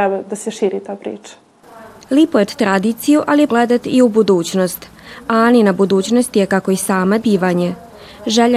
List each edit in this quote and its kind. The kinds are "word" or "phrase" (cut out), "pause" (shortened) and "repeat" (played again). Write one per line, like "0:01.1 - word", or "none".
0:02.5 - word
0:03.5 - word
0:07.2 - word